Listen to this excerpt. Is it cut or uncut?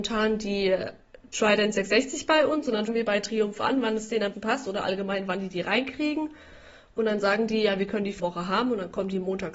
cut